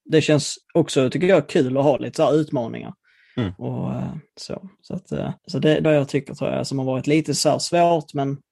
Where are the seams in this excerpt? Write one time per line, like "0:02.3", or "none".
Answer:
0:04.3
0:05.4
0:05.8